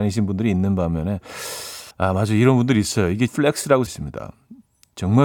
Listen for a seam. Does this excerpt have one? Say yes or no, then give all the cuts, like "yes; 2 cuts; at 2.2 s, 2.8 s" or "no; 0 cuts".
yes; 3 cuts; at 1.9 s, 3.3 s, 3.9 s